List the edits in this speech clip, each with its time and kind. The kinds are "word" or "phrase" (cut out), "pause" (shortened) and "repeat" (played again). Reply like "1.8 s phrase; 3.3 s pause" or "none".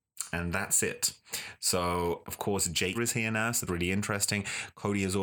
2.2 s word; 2.9 s word; 3.7 s word